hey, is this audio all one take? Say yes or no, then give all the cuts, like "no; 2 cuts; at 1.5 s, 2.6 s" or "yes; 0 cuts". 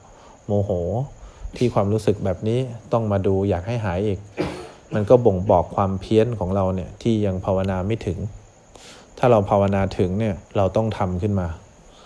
no; 1 cut; at 10.4 s